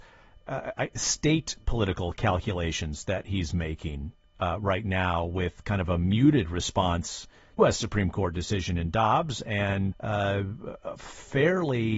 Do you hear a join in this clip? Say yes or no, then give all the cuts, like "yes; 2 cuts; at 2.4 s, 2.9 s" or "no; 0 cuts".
yes; 2 cuts; at 7.6 s, 9.9 s